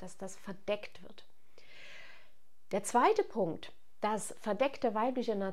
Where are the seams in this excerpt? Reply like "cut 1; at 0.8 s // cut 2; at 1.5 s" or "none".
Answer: none